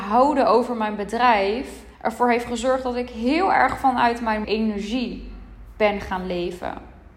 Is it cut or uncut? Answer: cut